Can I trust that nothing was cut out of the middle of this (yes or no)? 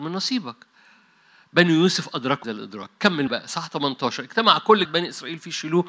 no